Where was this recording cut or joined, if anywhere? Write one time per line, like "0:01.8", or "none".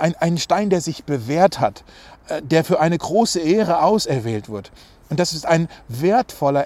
none